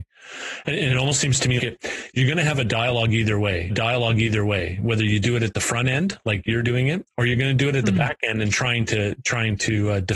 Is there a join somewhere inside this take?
yes; 2 cuts; at 1.6 s, 3.7 s

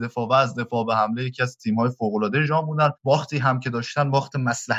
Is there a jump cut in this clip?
yes; 1 cut; at 3.0 s

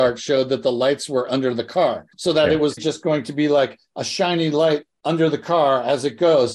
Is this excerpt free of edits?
no; 2 cuts; at 2.1 s, 2.8 s

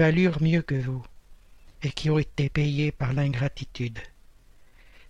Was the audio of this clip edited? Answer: no; 0 cuts

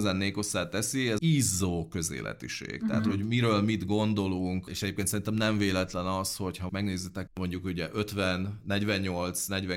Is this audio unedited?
no; 3 cuts; at 1.2 s, 6.7 s, 7.3 s

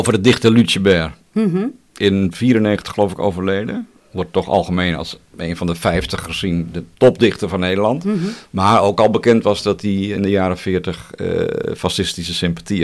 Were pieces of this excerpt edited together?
yes; 1 cut; at 6.9 s

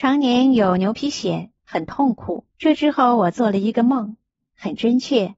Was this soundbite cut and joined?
yes; 2 cuts; at 1.6 s, 2.5 s

